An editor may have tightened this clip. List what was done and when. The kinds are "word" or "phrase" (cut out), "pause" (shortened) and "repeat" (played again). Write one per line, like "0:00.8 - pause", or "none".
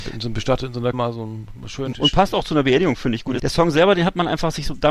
0:00.9 - word
0:01.9 - phrase
0:03.4 - word